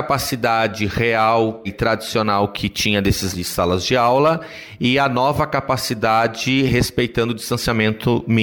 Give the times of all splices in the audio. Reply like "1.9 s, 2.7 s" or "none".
1.7 s, 3.3 s